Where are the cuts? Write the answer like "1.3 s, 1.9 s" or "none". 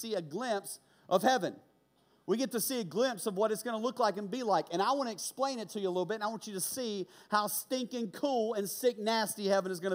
none